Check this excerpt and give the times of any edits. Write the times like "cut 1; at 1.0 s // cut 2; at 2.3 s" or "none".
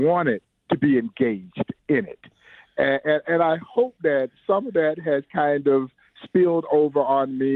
none